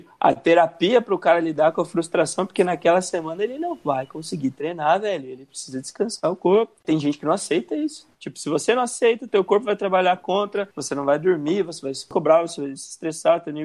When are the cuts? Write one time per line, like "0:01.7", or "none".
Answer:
0:06.8
0:08.1
0:10.7